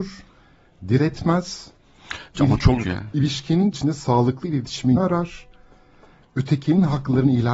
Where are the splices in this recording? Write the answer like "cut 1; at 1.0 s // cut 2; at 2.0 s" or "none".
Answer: cut 1; at 2.8 s // cut 2; at 3.7 s // cut 3; at 5.0 s